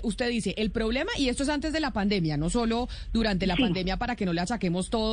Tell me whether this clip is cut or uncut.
uncut